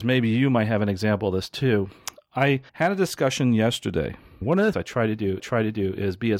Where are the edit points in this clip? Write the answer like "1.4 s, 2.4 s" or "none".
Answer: 2.7 s, 4.4 s, 4.7 s, 5.4 s